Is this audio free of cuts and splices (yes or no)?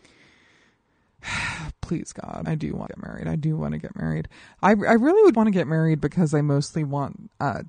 no